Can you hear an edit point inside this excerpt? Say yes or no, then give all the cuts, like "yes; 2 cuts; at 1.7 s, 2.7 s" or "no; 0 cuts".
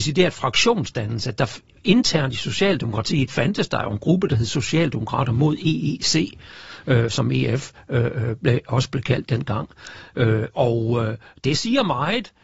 no; 0 cuts